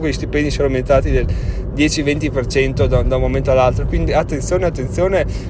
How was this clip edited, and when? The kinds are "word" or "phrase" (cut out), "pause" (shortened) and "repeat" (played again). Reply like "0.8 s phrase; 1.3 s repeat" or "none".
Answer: 4.1 s word